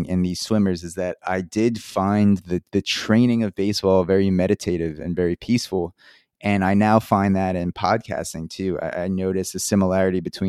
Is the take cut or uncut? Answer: uncut